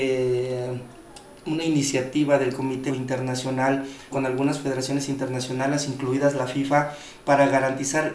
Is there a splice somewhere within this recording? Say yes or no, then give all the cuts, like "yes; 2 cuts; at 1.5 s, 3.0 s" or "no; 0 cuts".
yes; 2 cuts; at 2.9 s, 4.1 s